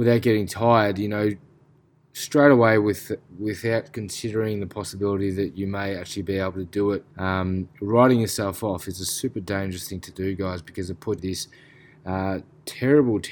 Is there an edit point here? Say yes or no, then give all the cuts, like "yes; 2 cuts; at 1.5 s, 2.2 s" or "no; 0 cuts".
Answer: yes; 2 cuts; at 7.1 s, 11.2 s